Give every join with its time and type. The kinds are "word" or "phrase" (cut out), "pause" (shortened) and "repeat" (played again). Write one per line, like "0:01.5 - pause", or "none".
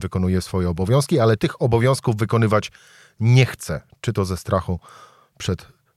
0:01.4 - word